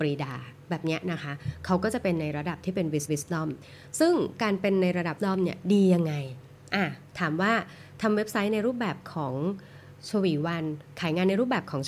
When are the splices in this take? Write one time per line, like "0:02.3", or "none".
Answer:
0:03.1
0:05.2